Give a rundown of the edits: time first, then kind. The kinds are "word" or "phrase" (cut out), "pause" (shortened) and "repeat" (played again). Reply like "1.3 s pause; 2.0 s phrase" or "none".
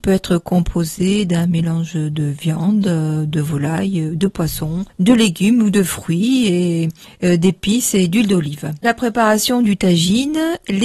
4.9 s pause